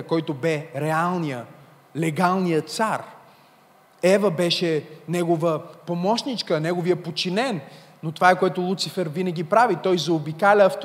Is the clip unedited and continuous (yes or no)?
yes